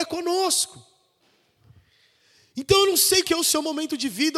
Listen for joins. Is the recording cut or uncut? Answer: cut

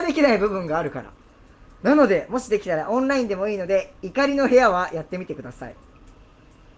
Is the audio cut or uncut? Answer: cut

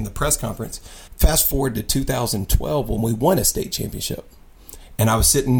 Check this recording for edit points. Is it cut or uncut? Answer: cut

